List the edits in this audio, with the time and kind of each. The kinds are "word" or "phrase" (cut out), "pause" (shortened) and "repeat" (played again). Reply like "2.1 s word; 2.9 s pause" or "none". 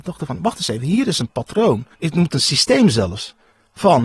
1.9 s pause